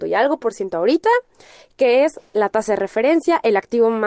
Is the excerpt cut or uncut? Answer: uncut